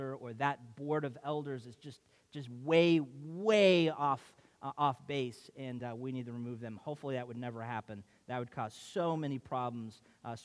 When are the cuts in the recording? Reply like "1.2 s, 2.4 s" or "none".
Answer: none